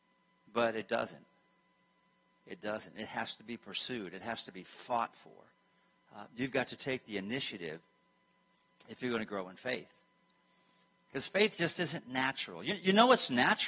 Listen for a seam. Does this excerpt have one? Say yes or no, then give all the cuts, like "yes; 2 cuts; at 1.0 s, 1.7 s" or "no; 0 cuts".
no; 0 cuts